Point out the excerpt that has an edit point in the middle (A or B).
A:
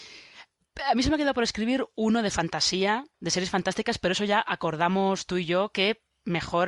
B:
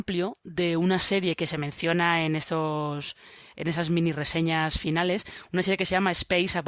A